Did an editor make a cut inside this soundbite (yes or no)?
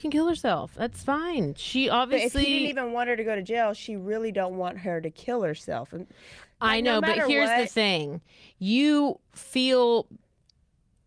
no